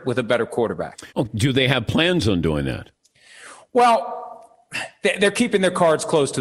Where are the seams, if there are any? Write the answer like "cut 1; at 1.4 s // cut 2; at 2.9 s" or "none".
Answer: cut 1; at 1.1 s